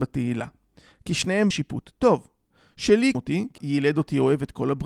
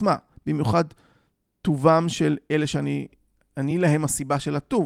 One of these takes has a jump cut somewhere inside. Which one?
first; 3 cuts; at 1.5 s, 3.1 s, 3.6 s

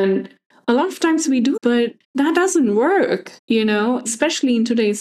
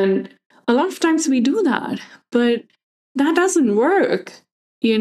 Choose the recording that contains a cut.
first; 4 cuts; at 1.6 s, 2.0 s, 3.4 s, 4.1 s

